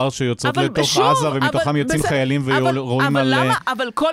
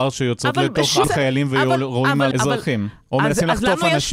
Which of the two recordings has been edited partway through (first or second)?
second